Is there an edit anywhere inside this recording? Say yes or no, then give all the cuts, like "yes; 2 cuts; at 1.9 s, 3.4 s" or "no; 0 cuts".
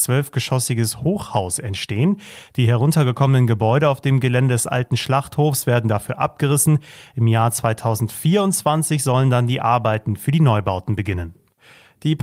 no; 0 cuts